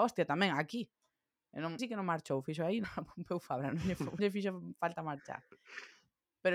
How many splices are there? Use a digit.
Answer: 3